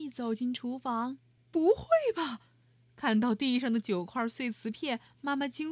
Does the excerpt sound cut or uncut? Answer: cut